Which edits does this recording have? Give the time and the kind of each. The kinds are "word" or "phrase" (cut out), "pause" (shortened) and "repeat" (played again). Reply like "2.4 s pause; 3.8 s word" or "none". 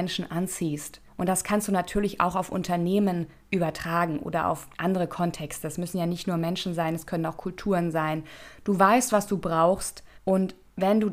1.1 s pause; 4.7 s pause; 10.1 s pause

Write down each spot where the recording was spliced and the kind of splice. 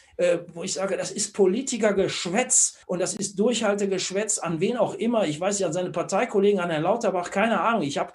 2.8 s pause

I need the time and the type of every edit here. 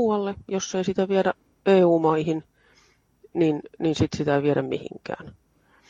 none

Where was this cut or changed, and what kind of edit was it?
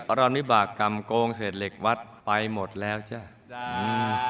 2.2 s pause

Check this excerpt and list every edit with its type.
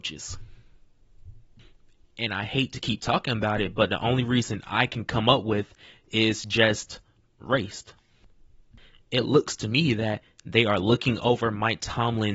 none

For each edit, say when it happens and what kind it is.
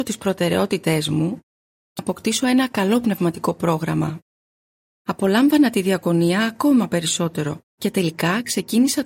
2.0 s word; 7.6 s pause

